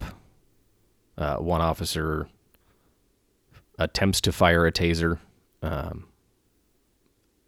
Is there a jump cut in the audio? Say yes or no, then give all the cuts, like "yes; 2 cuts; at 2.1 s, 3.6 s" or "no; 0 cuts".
no; 0 cuts